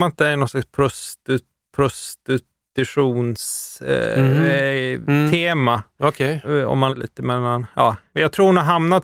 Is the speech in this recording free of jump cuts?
no; 2 cuts; at 1.7 s, 6.9 s

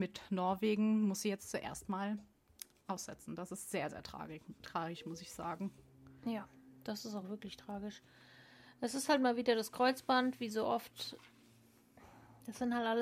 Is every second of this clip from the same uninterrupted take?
yes; 0 cuts

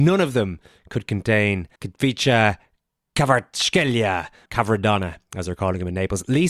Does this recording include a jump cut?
yes; 2 cuts; at 1.8 s, 4.5 s

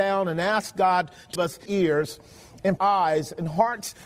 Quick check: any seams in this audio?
yes; 3 cuts; at 1.3 s, 1.7 s, 2.8 s

